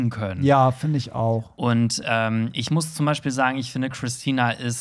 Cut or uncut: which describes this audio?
uncut